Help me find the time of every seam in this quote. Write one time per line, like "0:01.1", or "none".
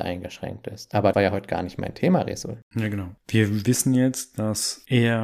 0:01.1